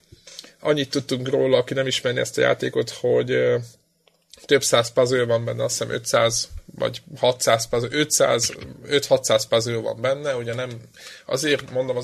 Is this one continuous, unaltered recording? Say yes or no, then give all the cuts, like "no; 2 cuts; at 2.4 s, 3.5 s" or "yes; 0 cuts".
yes; 0 cuts